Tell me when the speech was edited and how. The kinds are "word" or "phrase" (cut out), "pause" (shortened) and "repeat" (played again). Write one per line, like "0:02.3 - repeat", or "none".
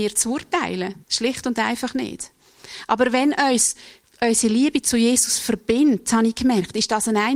0:01.0 - pause